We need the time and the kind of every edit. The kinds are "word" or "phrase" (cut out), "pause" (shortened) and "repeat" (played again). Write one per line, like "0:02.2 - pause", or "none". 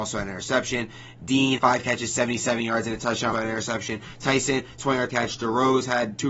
0:01.6 - word
0:03.3 - word
0:05.1 - word